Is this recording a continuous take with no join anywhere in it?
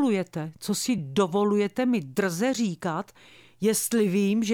yes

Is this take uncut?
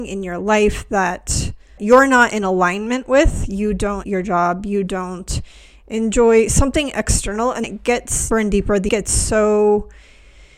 no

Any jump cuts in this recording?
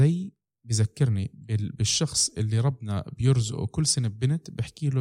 no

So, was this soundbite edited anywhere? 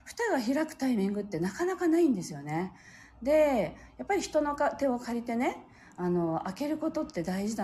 no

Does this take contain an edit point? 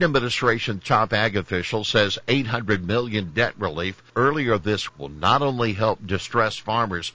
yes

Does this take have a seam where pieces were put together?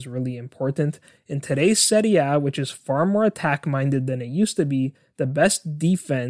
no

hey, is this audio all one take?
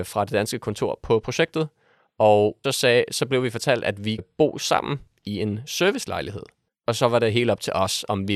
no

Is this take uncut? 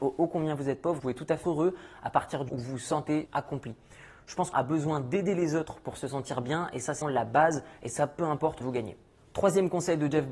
no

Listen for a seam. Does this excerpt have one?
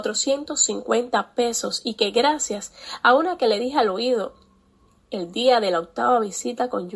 no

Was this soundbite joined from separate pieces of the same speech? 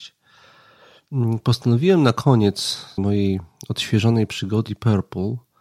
yes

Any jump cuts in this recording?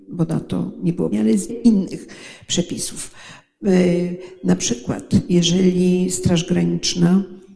yes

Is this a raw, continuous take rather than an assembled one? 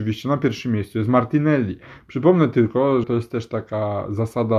no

